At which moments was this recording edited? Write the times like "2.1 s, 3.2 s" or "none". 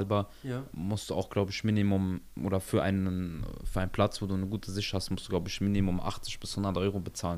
none